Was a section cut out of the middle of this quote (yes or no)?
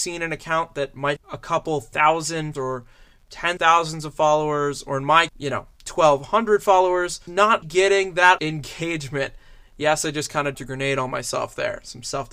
yes